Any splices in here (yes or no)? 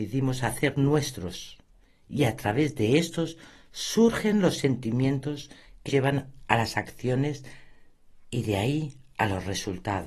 yes